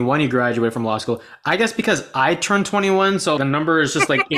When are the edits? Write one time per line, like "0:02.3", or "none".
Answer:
0:03.4